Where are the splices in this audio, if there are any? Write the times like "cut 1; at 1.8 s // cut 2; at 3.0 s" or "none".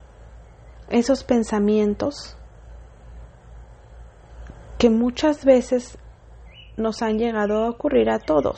none